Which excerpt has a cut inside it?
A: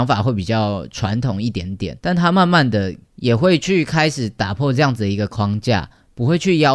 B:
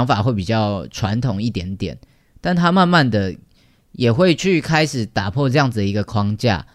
A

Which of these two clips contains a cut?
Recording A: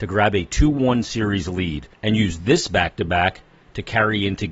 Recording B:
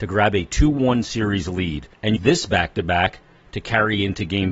B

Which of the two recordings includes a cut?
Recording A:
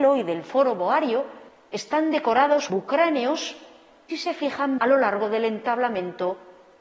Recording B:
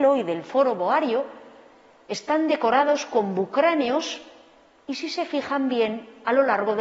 A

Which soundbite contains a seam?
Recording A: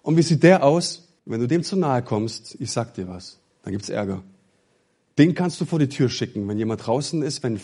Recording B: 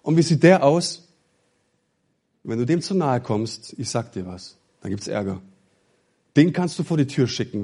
A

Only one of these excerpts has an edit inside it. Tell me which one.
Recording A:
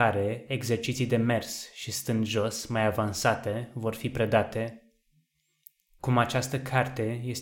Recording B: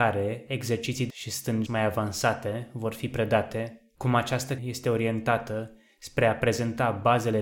B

